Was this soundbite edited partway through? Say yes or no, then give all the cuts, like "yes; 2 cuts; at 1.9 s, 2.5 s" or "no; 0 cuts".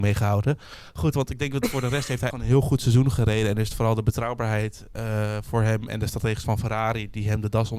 yes; 2 cuts; at 2.3 s, 6.4 s